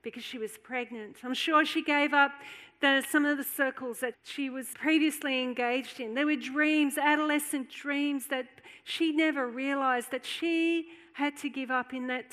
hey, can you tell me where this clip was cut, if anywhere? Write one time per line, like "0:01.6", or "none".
0:03.4
0:04.1
0:04.7